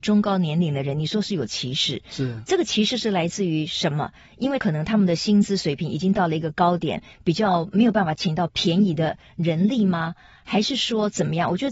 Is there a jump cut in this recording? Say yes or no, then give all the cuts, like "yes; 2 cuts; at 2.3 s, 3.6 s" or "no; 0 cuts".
no; 0 cuts